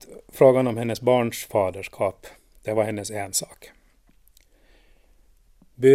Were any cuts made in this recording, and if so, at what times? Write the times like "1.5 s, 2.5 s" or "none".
none